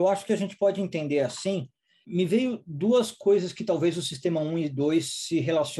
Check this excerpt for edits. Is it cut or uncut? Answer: uncut